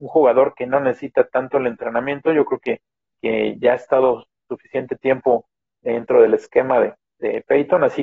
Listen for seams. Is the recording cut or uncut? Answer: uncut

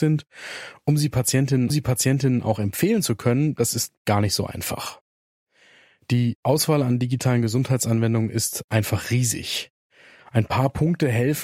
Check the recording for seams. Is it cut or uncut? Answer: cut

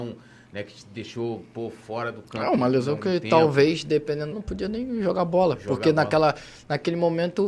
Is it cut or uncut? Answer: cut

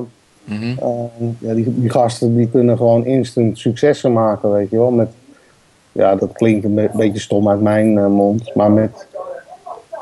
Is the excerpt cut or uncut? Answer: cut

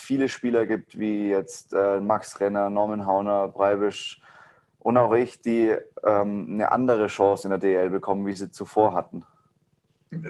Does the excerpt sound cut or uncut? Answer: uncut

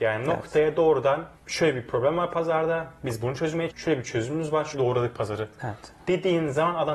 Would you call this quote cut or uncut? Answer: cut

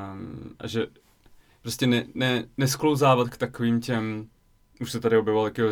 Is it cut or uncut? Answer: uncut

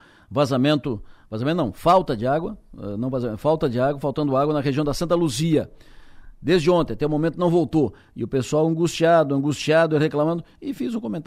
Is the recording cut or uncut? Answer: uncut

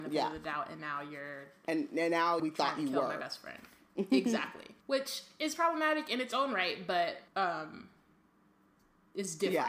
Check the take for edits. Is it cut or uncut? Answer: cut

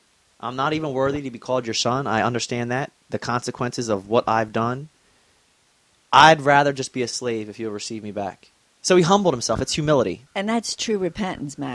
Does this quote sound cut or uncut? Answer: uncut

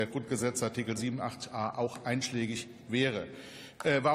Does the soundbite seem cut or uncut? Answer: uncut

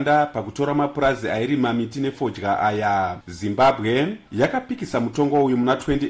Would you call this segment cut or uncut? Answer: uncut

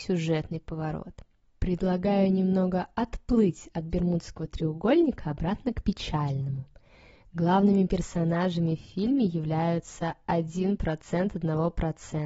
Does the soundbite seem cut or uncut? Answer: uncut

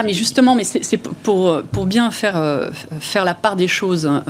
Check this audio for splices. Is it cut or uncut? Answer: uncut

